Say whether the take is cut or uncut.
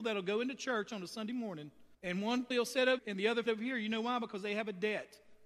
cut